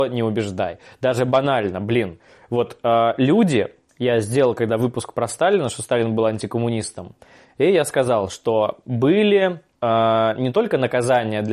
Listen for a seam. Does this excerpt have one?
no; 0 cuts

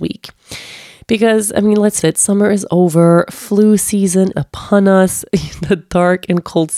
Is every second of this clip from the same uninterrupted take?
no; 2 cuts; at 2.0 s, 4.3 s

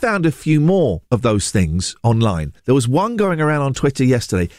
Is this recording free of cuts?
no; 2 cuts; at 1.1 s, 2.6 s

